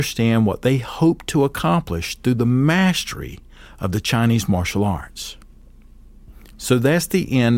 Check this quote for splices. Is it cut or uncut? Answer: uncut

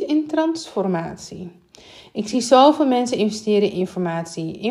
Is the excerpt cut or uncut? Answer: uncut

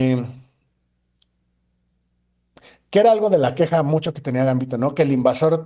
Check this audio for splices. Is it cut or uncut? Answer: uncut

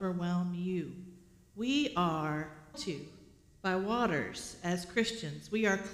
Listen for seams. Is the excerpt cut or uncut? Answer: cut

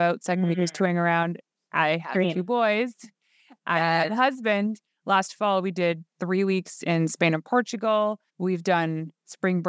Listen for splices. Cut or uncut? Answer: cut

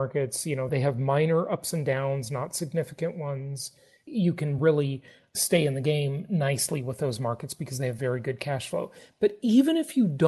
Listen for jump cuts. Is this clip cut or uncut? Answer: uncut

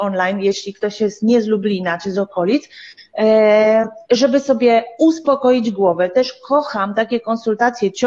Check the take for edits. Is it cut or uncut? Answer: uncut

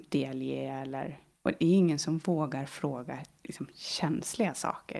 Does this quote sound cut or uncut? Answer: uncut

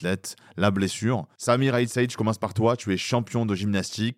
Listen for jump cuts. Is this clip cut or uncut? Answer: uncut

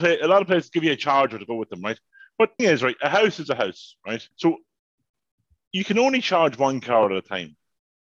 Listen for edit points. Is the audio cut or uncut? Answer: cut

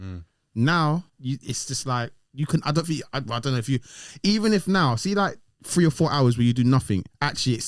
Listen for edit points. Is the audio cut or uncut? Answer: cut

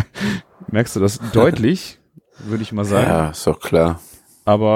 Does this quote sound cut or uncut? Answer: uncut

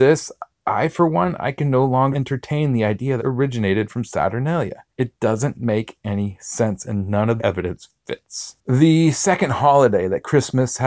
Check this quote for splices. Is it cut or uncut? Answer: cut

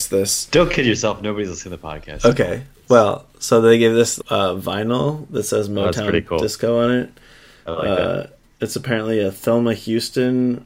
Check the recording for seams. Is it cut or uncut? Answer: cut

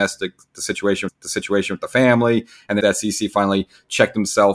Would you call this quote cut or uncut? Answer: cut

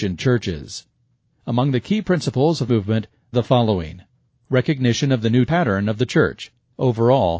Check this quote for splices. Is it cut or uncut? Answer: cut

